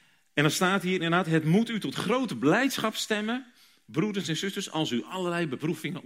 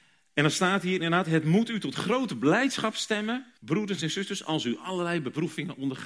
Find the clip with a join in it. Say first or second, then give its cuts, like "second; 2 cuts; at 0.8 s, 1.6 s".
second; 1 cut; at 3.6 s